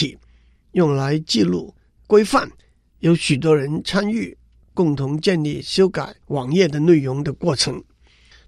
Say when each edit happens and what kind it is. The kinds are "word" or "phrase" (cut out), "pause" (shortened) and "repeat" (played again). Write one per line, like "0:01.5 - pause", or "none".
0:02.0 - phrase